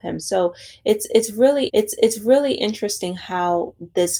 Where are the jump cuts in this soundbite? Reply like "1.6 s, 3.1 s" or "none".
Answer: 1.7 s